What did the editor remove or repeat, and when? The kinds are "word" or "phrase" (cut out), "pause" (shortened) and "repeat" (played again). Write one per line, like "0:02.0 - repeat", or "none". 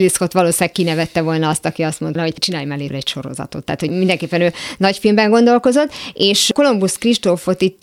0:02.2 - word
0:02.9 - word